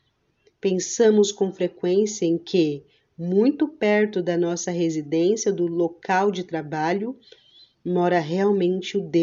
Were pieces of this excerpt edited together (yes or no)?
no